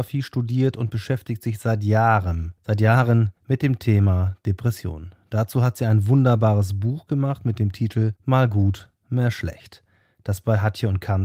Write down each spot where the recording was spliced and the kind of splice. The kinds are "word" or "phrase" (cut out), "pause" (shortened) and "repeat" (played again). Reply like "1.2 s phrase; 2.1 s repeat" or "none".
2.6 s pause; 3.4 s pause; 8.2 s pause

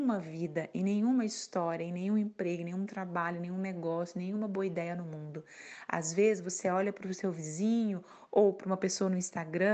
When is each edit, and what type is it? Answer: none

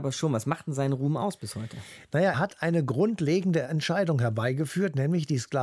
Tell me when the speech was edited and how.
2.3 s word

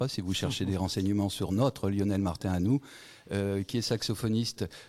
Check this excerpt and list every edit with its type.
none

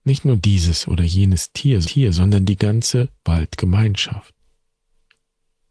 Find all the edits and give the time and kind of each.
1.8 s repeat; 3.2 s pause

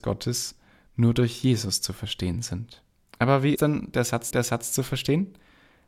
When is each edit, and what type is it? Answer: 3.1 s pause; 3.6 s word; 4.3 s repeat

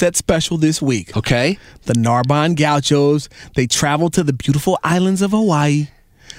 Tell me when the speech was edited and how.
none

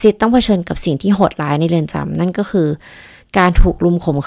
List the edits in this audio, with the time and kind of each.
none

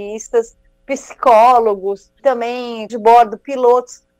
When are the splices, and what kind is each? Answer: 2.2 s word; 2.9 s word

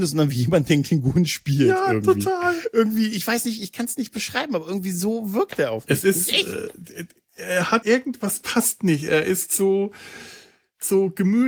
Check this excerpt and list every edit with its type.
7.8 s word

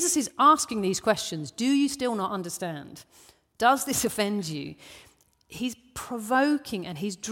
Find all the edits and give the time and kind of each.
none

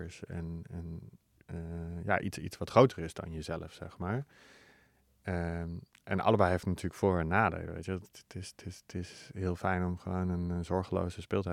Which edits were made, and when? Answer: none

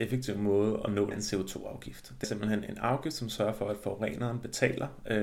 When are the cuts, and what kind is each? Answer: 1.1 s phrase; 2.2 s word

